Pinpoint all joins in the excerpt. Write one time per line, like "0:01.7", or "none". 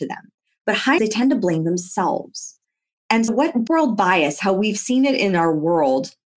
0:01.0
0:03.3
0:03.7